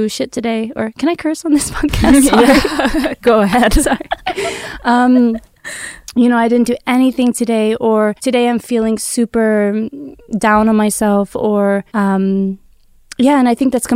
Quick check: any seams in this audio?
yes; 2 cuts; at 8.2 s, 11.9 s

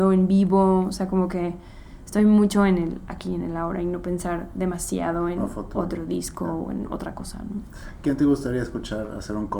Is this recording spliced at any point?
no; 0 cuts

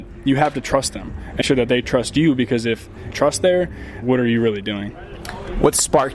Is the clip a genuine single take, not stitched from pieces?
no; 3 cuts; at 1.4 s, 3.1 s, 4.0 s

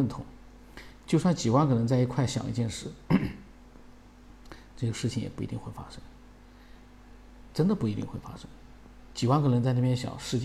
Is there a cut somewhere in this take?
no; 0 cuts

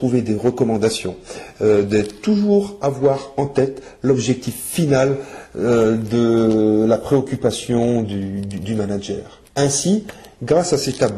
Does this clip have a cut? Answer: yes; 1 cut; at 9.5 s

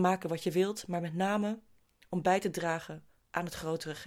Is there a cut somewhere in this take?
no; 0 cuts

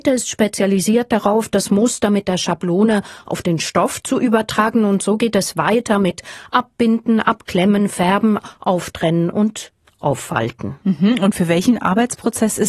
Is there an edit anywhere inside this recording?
no; 0 cuts

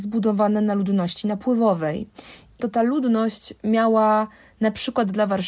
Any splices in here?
yes; 1 cut; at 2.6 s

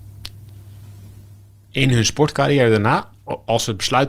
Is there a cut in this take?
no; 0 cuts

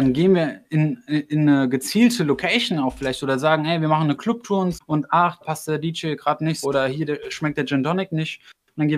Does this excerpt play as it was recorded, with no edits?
no; 3 cuts; at 4.7 s, 5.4 s, 6.6 s

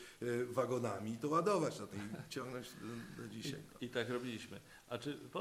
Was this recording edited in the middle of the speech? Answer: yes; 1 cut; at 1.9 s

